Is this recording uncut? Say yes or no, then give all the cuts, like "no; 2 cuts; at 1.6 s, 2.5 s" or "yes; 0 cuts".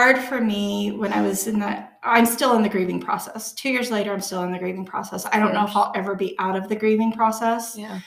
yes; 0 cuts